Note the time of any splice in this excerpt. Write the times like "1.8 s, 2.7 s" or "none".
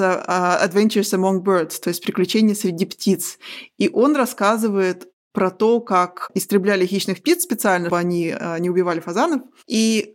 7.9 s